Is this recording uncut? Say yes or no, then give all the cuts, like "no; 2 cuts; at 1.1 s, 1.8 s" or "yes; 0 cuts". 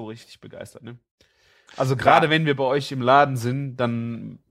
yes; 0 cuts